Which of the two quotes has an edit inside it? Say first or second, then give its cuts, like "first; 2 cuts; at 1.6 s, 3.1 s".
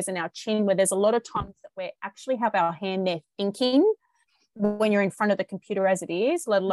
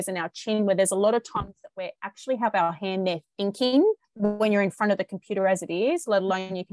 second; 1 cut; at 4.0 s